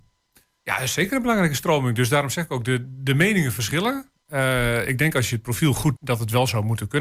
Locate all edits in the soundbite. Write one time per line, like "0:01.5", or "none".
0:06.0